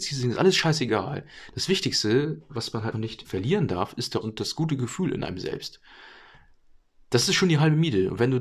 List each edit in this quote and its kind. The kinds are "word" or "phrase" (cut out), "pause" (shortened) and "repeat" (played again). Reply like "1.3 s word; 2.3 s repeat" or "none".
2.9 s word; 3.2 s word; 4.2 s word